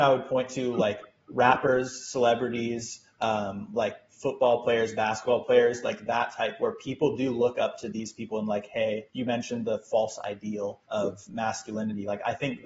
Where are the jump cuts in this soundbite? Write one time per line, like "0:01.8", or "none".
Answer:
0:09.1
0:10.8